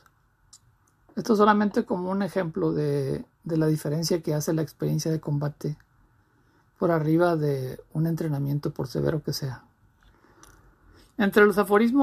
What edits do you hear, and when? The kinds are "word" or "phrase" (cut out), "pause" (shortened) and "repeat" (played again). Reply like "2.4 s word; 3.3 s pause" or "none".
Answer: none

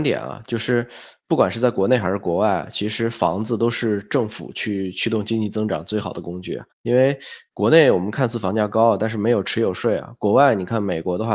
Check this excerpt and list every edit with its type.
6.7 s pause

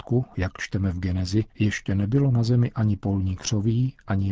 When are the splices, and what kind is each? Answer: 1.5 s pause

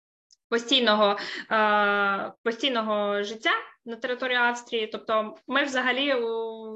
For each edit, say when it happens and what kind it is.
2.3 s pause

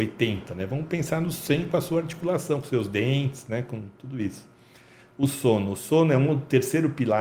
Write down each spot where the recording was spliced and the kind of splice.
none

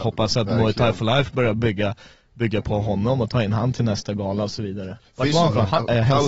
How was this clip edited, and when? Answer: none

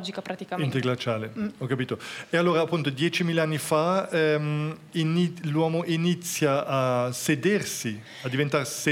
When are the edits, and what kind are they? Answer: none

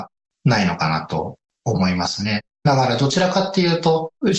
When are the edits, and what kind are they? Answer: none

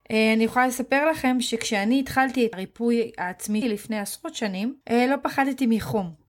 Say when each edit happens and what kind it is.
2.5 s word; 3.6 s word; 4.8 s pause

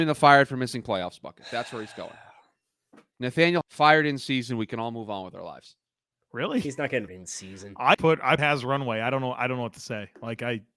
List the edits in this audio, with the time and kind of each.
3.6 s word; 7.1 s word; 7.9 s word; 8.4 s word

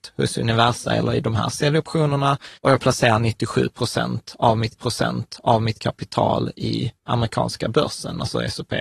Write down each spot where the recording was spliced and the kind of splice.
2.6 s pause; 4.7 s repeat; 7.0 s pause

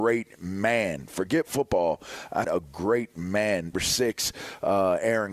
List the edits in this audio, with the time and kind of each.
2.4 s phrase; 3.7 s word

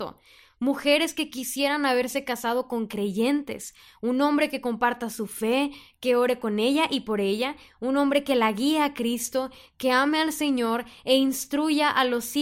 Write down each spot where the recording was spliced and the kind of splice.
none

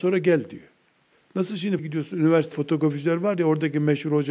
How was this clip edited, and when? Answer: 1.1 s pause; 1.8 s word; 2.5 s word

